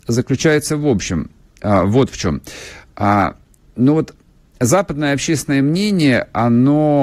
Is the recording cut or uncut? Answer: uncut